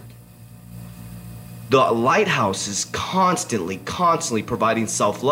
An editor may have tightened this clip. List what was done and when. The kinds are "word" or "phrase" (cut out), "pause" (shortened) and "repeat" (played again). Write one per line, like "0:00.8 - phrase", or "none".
none